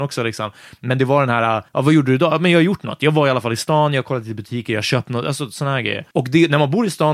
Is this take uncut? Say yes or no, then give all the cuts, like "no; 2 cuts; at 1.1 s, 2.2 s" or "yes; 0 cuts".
no; 2 cuts; at 1.7 s, 6.1 s